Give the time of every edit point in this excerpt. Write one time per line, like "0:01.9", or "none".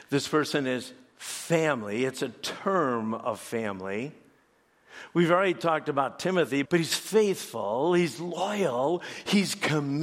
0:06.6